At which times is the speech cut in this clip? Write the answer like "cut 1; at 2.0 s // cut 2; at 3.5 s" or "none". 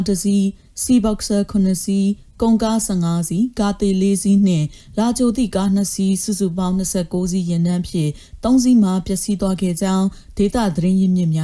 none